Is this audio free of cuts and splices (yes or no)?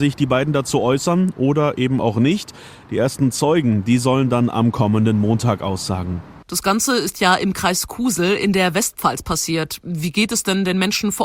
no